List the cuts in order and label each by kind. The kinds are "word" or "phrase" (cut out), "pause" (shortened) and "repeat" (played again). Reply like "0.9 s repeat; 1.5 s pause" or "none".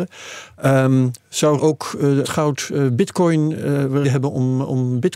1.6 s word; 2.2 s word; 4.0 s word